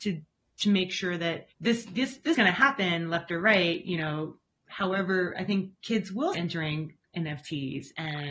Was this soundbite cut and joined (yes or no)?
yes